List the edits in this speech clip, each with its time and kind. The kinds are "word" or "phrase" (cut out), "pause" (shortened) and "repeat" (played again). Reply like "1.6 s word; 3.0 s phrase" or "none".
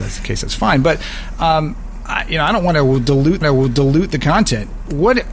3.4 s repeat